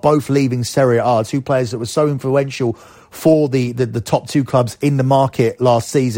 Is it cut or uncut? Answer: uncut